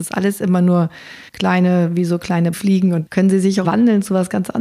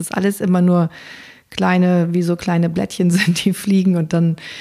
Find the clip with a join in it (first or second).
first